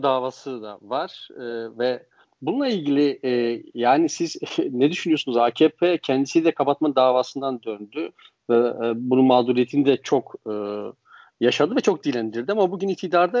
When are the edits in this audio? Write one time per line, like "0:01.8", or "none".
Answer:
none